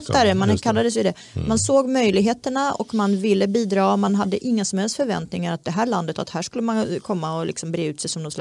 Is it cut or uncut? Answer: uncut